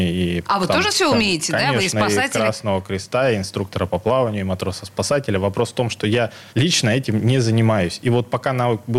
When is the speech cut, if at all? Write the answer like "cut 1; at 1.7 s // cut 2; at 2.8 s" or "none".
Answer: cut 1; at 6.5 s